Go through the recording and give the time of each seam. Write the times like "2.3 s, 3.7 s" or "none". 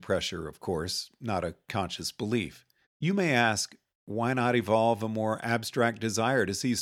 2.8 s